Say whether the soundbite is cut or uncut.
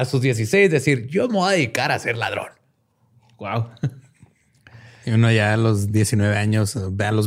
uncut